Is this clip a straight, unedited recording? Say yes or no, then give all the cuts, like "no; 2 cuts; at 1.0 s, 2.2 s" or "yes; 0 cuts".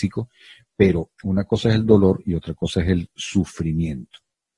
no; 1 cut; at 1.1 s